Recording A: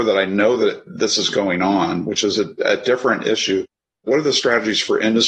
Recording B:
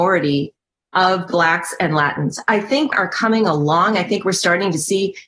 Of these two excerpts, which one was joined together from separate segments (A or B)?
B